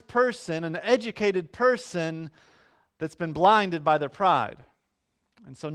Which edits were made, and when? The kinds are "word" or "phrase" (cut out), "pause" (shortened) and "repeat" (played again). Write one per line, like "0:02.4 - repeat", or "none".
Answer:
none

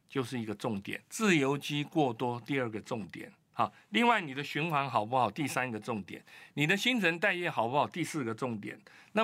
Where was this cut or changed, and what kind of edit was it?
0:01.0 - pause

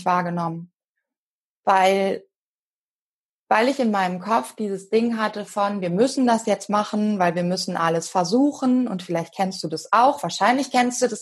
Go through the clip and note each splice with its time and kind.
none

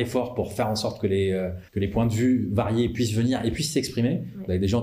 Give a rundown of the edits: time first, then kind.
0:01.7 - pause

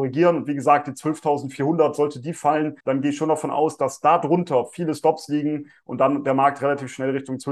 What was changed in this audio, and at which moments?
0:02.8 - pause

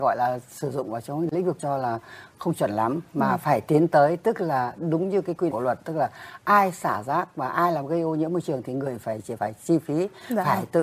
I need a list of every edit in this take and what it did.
0:01.6 - phrase
0:05.5 - word
0:09.4 - word

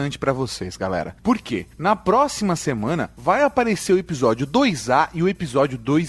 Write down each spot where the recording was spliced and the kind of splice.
none

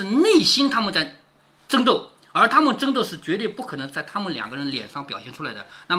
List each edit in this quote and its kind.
none

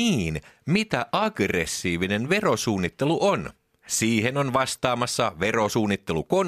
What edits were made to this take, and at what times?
none

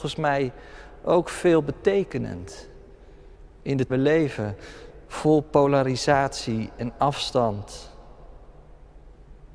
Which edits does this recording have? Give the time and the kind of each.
0:03.9 - phrase

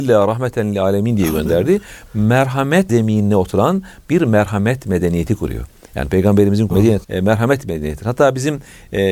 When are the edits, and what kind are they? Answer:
0:02.9 - word
0:06.7 - word
0:07.0 - word

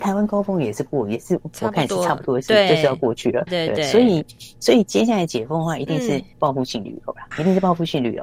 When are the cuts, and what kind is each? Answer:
0:03.5 - word
0:06.3 - pause
0:07.3 - word

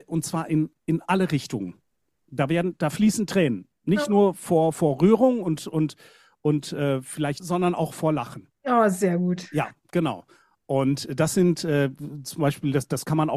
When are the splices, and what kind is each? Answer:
0:07.4 - word

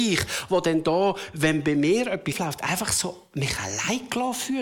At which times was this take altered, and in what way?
0:02.3 - word

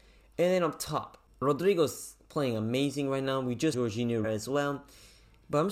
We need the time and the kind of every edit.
0:03.7 - word
0:04.2 - word

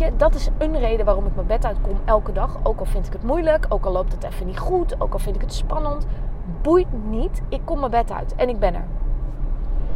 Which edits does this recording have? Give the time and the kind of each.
none

